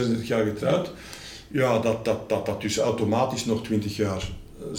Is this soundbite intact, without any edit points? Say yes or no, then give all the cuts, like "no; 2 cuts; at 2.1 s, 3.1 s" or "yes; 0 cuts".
yes; 0 cuts